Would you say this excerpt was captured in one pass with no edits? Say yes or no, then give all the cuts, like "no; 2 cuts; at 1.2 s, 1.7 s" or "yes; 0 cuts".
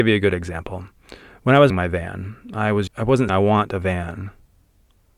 no; 3 cuts; at 1.7 s, 2.9 s, 3.3 s